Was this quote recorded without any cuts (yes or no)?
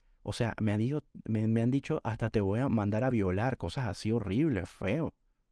yes